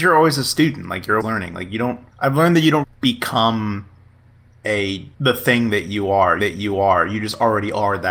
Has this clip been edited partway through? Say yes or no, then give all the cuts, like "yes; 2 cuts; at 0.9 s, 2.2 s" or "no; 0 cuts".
yes; 5 cuts; at 1.2 s, 2.1 s, 2.8 s, 5.1 s, 6.4 s